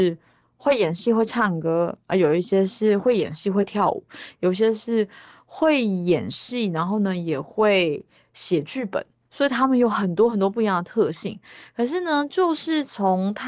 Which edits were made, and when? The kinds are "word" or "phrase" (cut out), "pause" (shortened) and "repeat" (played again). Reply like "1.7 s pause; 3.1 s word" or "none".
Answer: none